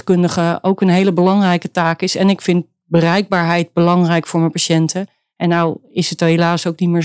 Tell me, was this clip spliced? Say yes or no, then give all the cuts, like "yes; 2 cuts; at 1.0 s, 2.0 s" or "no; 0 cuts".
no; 0 cuts